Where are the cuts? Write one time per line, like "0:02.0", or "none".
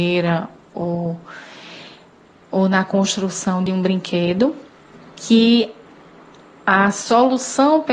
none

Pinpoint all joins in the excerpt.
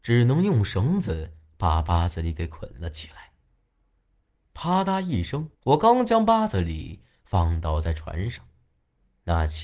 0:05.5

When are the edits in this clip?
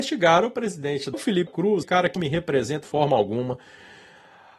0:01.1
0:01.5
0:01.8
0:02.2
0:02.8

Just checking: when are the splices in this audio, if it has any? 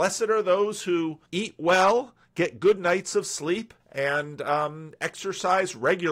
0:01.3
0:03.8

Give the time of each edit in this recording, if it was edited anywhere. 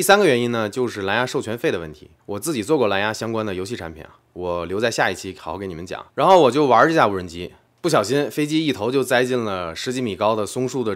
0:02.2

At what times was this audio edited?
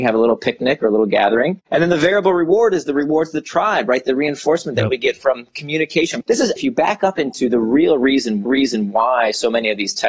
0:06.2
0:06.6
0:08.5

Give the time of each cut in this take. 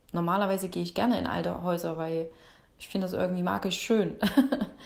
none

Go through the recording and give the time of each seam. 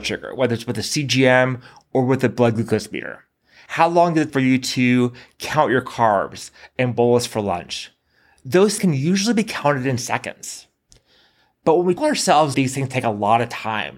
0:04.3
0:08.8
0:12.0
0:12.5

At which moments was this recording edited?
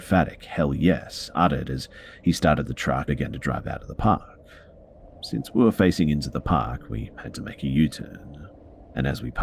0:03.1

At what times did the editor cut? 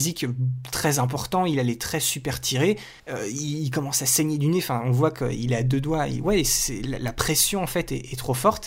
0:03.0

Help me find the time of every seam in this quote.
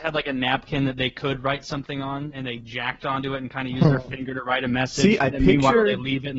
0:02.6
0:05.2

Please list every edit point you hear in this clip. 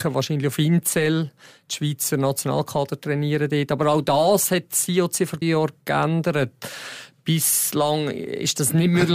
0:05.4

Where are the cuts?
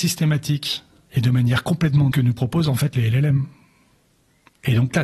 0:02.1

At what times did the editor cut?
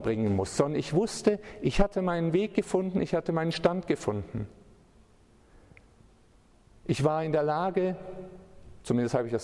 none

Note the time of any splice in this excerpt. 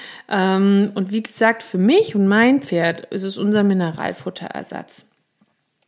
none

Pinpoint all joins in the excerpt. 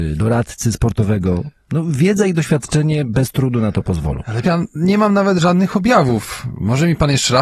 0:04.4

